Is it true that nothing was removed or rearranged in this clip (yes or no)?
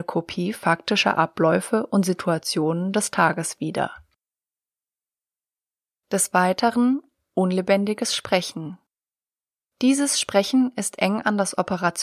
yes